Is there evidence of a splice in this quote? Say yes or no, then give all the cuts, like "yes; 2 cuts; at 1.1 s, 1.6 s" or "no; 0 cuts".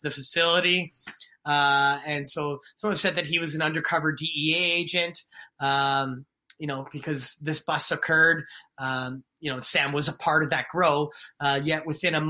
no; 0 cuts